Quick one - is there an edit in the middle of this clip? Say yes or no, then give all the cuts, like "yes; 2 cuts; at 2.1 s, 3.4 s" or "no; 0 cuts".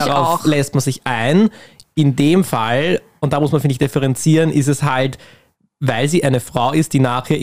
no; 0 cuts